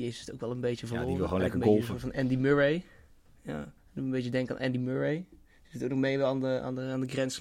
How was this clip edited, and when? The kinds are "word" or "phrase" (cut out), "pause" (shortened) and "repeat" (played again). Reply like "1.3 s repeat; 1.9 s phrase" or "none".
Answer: 3.8 s pause